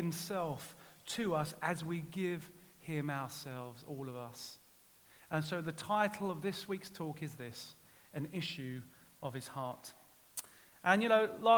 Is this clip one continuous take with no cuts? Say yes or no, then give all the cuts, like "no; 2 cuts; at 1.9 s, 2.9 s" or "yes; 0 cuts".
yes; 0 cuts